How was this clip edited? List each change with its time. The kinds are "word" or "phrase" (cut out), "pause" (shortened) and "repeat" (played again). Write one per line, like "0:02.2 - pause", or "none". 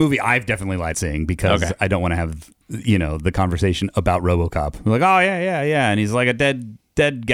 0:00.9 - word
0:02.6 - pause